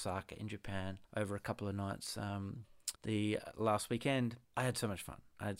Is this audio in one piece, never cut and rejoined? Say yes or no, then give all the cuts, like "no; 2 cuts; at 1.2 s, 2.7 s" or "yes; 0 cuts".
no; 3 cuts; at 1.0 s, 3.0 s, 4.4 s